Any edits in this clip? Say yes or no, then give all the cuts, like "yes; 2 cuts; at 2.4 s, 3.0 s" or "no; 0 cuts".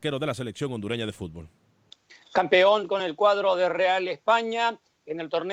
no; 0 cuts